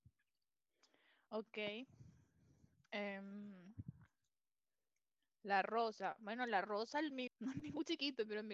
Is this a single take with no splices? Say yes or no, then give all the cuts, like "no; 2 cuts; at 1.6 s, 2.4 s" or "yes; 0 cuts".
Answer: no; 1 cut; at 7.3 s